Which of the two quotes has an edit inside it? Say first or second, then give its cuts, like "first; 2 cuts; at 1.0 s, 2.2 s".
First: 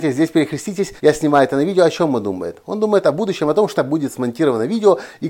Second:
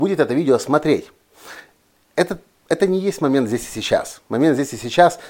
first; 2 cuts; at 1.0 s, 3.8 s